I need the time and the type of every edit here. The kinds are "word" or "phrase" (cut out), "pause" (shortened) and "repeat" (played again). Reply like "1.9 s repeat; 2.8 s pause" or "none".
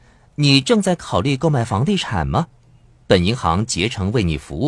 none